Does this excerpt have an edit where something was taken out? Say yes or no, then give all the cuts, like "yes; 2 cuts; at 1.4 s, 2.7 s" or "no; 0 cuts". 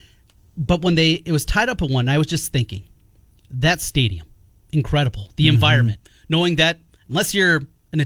no; 0 cuts